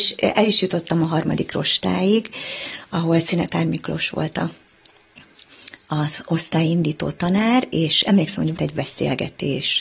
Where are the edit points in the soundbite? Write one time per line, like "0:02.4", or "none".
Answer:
0:08.6